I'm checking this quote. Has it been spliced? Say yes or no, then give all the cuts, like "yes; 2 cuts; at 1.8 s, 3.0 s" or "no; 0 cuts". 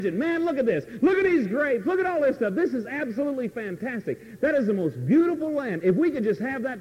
no; 0 cuts